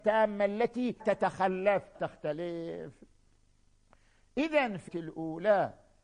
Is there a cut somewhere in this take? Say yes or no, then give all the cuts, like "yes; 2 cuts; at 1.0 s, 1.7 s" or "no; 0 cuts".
yes; 3 cuts; at 1.0 s, 1.9 s, 4.9 s